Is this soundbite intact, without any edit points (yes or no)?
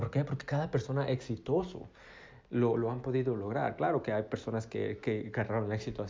yes